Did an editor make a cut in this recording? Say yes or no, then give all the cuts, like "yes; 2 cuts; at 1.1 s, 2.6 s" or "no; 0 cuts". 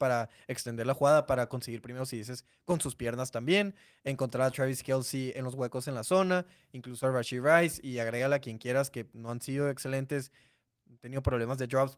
no; 0 cuts